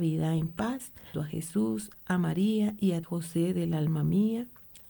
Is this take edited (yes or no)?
yes